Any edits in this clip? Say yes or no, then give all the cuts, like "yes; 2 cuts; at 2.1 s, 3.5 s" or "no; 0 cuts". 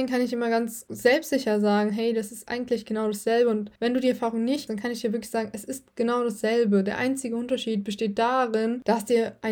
yes; 2 cuts; at 3.8 s, 4.7 s